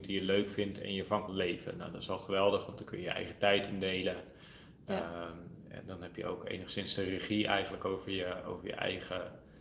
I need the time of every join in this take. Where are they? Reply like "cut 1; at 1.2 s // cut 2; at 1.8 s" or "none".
cut 1; at 1.3 s